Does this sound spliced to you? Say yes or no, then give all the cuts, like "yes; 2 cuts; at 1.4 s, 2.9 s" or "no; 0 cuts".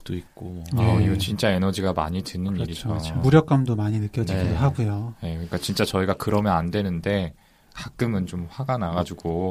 no; 0 cuts